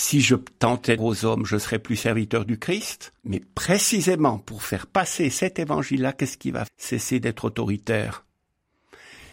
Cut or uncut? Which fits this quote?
cut